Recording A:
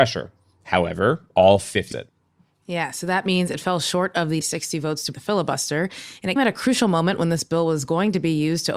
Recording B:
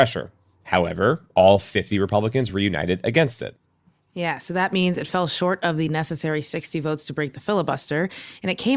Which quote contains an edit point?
A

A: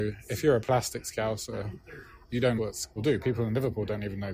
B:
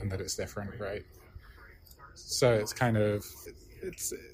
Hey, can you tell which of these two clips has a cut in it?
A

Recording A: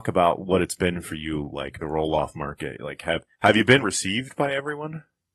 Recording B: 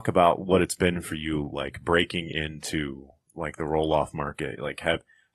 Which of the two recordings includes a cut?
A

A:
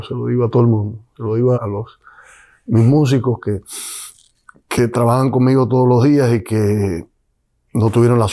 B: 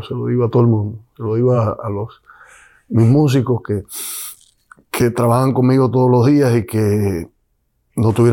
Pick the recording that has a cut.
A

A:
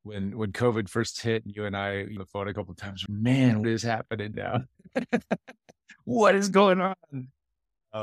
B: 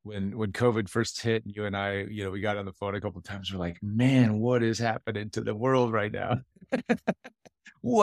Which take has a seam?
A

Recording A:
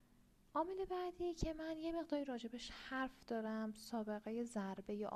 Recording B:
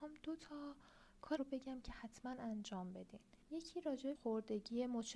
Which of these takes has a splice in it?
B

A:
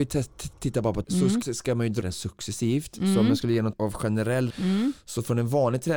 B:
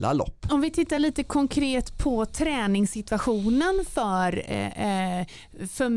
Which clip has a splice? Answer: A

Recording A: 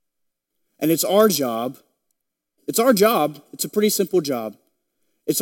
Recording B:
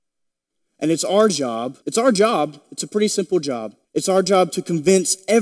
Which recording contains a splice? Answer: B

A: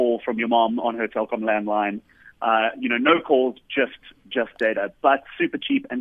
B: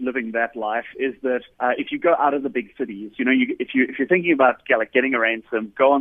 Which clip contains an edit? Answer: B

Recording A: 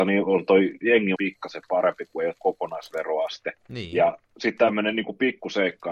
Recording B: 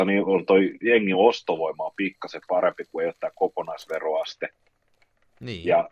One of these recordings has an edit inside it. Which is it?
A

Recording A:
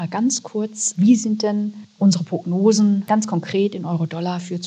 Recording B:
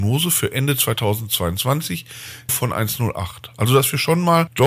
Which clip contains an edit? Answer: B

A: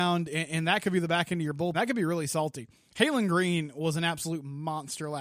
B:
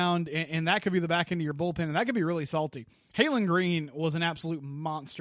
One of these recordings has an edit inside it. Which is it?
A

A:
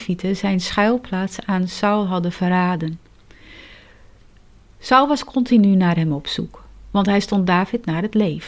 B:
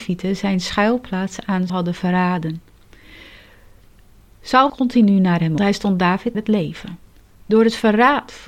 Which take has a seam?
B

